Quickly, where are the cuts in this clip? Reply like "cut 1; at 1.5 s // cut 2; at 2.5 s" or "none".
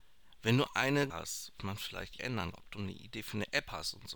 cut 1; at 1.1 s // cut 2; at 1.6 s // cut 3; at 2.2 s // cut 4; at 2.5 s